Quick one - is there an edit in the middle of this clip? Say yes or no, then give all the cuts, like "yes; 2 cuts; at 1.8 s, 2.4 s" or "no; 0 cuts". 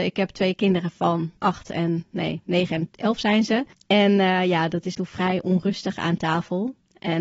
yes; 3 cuts; at 1.4 s, 3.7 s, 4.9 s